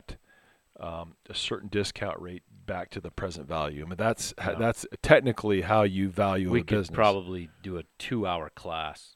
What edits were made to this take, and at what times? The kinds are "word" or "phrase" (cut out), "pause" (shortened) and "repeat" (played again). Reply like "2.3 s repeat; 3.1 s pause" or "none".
none